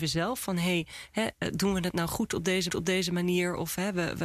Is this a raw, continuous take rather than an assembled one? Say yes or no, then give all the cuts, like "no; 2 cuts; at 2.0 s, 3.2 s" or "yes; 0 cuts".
no; 1 cut; at 2.7 s